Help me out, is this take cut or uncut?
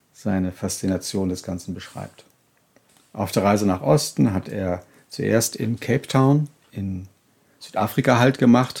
uncut